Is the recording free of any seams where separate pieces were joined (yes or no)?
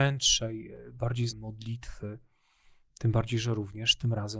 no